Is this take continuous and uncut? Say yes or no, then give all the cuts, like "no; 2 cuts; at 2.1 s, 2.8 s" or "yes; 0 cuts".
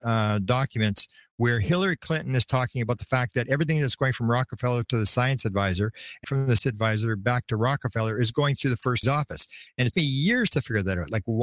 no; 4 cuts; at 6.2 s, 6.6 s, 9.0 s, 9.9 s